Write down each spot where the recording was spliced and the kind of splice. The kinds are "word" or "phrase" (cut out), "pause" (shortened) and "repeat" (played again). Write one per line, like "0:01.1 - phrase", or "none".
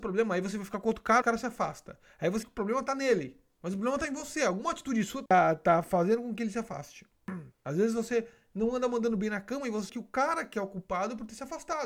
0:01.2 - word
0:02.4 - word
0:05.3 - word
0:07.5 - pause
0:09.9 - word